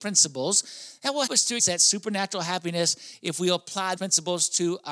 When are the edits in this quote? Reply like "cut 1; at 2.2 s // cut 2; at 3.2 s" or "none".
cut 1; at 1.3 s // cut 2; at 1.6 s // cut 3; at 4.0 s